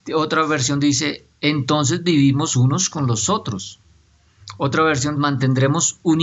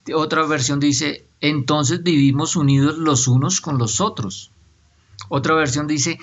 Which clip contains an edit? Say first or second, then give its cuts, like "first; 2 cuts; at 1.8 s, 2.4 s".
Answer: first; 2 cuts; at 2.5 s, 5.2 s